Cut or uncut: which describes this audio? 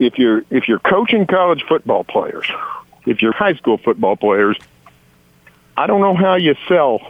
cut